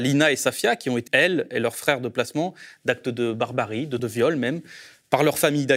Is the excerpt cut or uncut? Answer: cut